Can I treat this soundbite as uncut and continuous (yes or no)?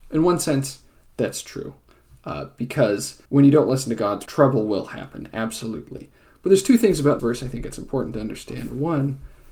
no